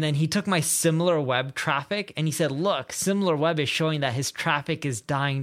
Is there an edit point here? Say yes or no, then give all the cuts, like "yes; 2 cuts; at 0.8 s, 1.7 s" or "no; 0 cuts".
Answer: no; 0 cuts